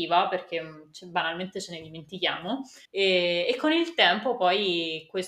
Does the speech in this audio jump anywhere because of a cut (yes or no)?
yes